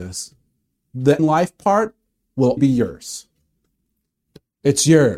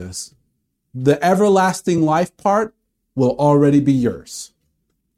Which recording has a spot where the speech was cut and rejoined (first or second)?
first